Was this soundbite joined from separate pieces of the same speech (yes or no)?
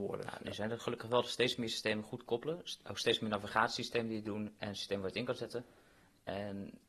no